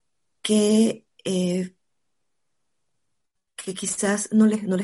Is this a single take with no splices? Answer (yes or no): yes